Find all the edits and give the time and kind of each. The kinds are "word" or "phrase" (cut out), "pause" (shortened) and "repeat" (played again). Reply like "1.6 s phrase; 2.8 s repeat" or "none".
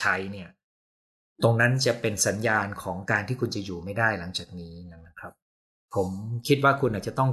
none